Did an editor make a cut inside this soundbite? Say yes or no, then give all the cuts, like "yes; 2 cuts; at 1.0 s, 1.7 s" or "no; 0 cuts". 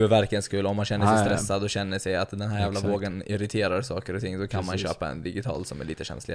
no; 0 cuts